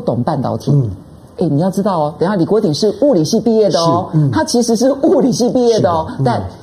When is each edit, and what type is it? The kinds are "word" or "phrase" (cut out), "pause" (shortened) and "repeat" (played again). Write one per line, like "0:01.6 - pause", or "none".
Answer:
0:01.3 - word